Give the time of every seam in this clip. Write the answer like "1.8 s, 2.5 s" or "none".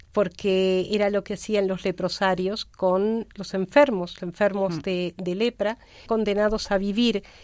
1.3 s, 3.3 s, 4.2 s, 6.1 s